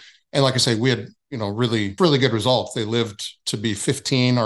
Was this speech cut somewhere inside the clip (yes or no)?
yes